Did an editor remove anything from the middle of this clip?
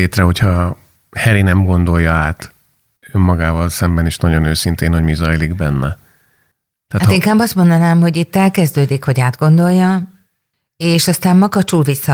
no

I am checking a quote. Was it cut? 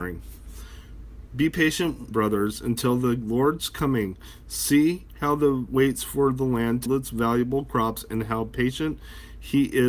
yes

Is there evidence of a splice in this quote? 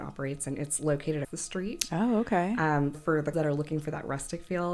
yes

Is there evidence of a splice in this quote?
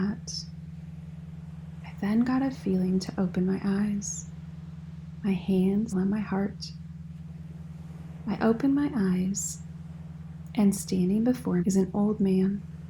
yes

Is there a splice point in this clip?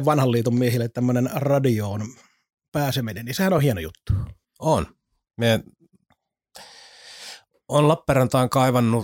no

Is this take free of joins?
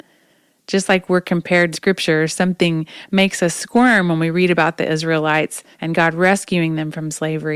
no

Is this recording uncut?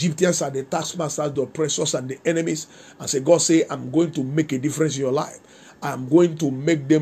yes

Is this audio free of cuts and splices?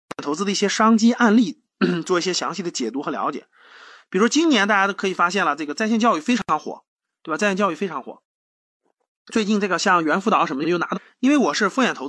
yes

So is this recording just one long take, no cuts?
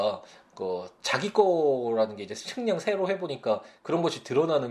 yes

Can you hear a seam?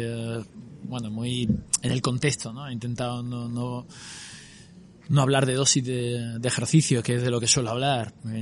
no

